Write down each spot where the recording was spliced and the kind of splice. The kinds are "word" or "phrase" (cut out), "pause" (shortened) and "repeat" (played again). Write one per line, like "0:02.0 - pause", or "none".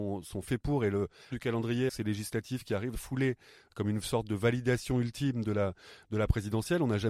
0:01.3 - word
0:01.9 - word
0:02.9 - word